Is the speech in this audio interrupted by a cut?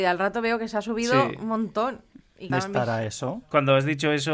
yes; 1 cut; at 2.5 s

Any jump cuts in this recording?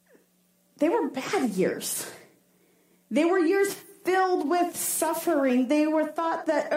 no; 0 cuts

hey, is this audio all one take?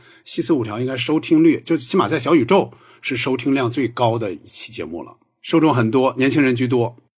yes; 0 cuts

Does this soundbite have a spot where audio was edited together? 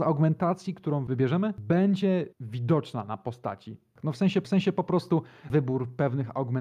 yes; 2 cuts; at 2.3 s, 4.4 s

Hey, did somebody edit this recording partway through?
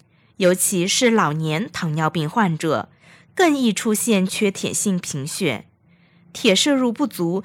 no; 0 cuts

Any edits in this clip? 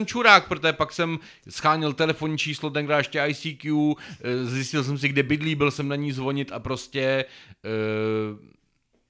no; 0 cuts

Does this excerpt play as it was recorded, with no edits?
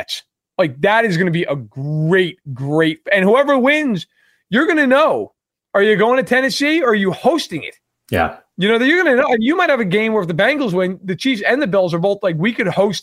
yes; 0 cuts

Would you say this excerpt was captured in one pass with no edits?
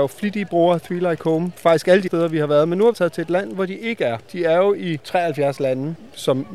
no; 2 cuts; at 2.1 s, 2.9 s

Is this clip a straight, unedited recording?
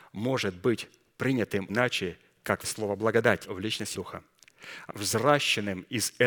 no; 5 cuts; at 1.7 s, 2.6 s, 3.4 s, 3.9 s, 4.9 s

